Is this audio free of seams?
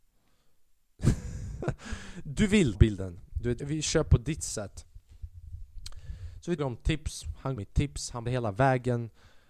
no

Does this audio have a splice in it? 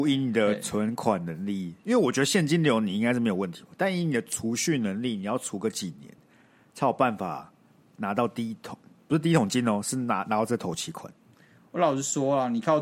no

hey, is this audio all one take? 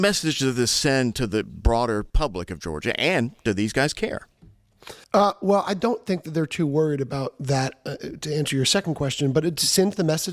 no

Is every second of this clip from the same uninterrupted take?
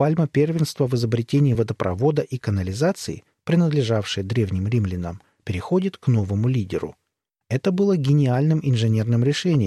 yes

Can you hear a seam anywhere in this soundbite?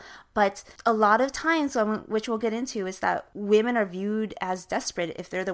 no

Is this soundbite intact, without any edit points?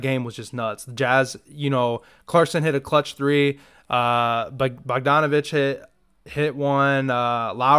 yes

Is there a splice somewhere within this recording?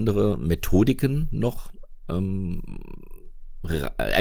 no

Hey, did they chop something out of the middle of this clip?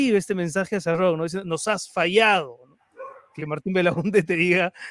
yes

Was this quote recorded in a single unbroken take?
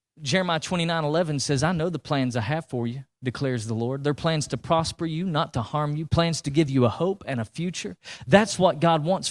yes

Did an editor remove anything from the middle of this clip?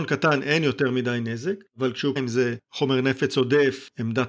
yes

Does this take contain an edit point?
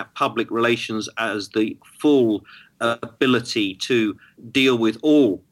no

